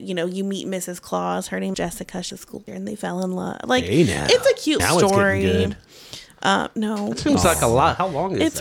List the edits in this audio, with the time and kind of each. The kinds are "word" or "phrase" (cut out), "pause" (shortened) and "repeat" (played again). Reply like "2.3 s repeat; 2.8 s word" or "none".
1.7 s word; 2.3 s word; 2.7 s word; 4.8 s word

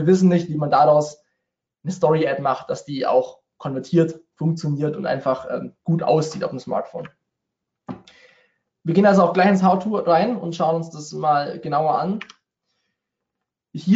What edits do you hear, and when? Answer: 5.8 s pause

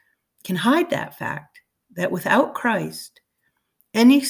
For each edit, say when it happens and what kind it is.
none

